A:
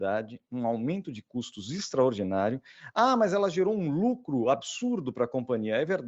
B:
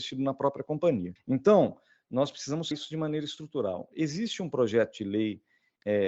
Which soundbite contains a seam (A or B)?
B